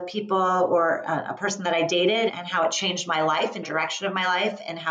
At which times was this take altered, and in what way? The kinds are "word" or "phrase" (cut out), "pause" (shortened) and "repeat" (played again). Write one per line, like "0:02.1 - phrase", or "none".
0:02.3 - word
0:03.6 - phrase

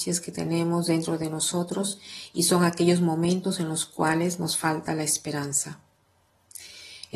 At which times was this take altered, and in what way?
none

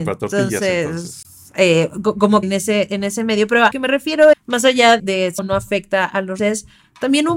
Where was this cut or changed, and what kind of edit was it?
0:02.4 - word
0:03.7 - word
0:04.3 - word
0:05.0 - word
0:05.4 - word
0:06.4 - word

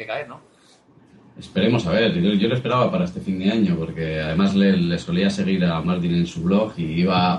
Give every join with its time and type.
none

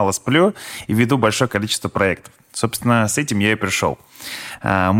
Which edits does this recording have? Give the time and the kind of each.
none

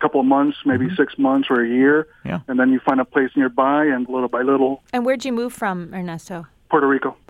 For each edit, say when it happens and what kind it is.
0:04.1 - phrase

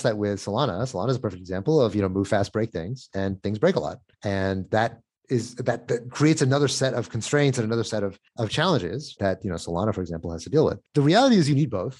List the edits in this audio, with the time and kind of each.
0:04.1 - pause
0:08.3 - pause
0:09.2 - word
0:10.9 - pause

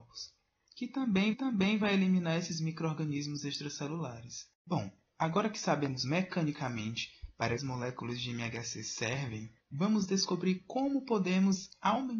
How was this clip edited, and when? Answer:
0:01.3 - repeat
0:04.5 - pause
0:07.6 - phrase
0:09.6 - pause

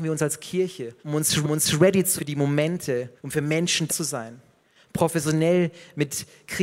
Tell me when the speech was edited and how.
0:01.0 - pause
0:01.4 - repeat
0:02.2 - word
0:03.2 - pause
0:03.9 - word

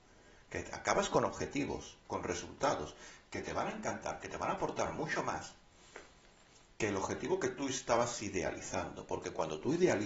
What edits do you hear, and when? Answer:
0:02.0 - pause

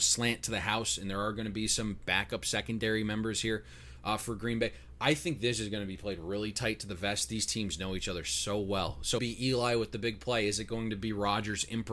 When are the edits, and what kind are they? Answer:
0:09.2 - phrase

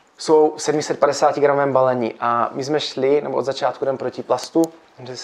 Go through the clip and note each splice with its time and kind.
none

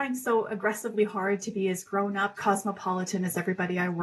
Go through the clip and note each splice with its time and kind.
0:02.4 - word

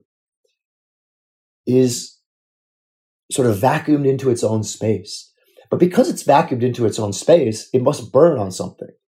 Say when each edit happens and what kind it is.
none

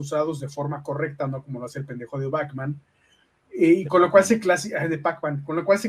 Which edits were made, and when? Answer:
none

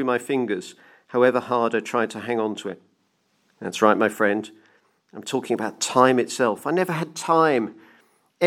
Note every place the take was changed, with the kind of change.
none

